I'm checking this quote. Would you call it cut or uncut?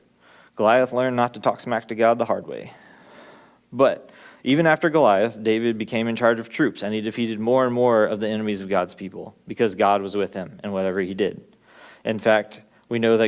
uncut